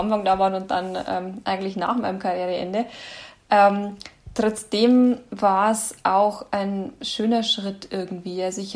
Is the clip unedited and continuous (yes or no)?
yes